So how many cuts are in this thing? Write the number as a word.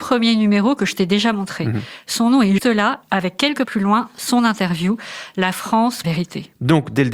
three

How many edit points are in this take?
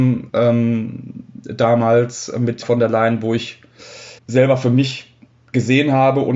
three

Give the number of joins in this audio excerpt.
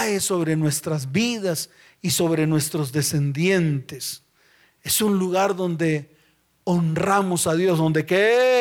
zero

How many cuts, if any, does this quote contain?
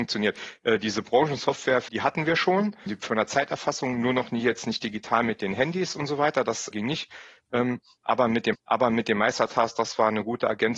four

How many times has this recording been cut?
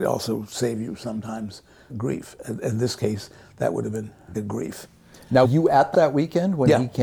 four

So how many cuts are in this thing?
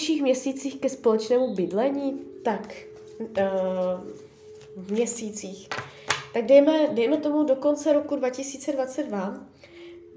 zero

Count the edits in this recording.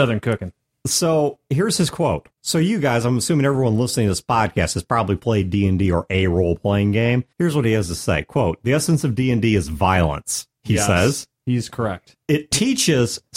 one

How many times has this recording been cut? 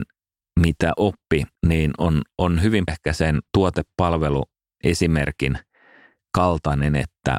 three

